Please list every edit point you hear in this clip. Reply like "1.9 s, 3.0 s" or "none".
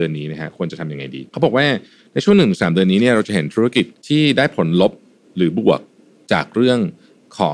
1.3 s, 4.0 s